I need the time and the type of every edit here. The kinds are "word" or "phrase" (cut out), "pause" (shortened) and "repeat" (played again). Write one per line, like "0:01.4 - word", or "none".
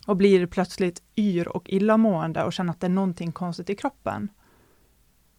none